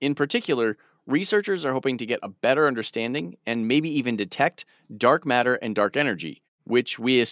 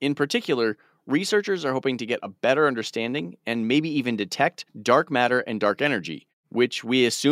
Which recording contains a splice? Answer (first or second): second